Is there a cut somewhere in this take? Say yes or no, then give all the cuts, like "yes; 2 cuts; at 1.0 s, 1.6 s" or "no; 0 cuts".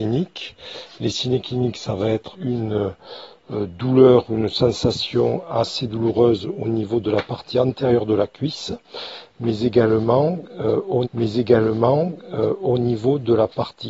yes; 2 cuts; at 2.3 s, 11.0 s